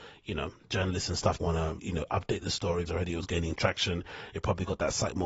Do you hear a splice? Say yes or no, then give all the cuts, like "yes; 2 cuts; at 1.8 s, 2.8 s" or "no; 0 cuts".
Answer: yes; 3 cuts; at 1.4 s, 1.8 s, 2.9 s